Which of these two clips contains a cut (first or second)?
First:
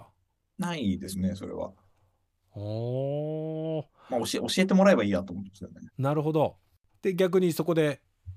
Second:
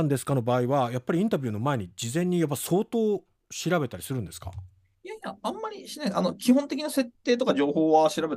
first